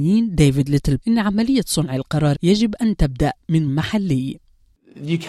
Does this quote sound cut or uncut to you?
cut